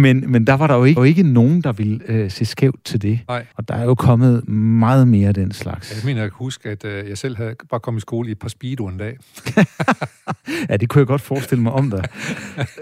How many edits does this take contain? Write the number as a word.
two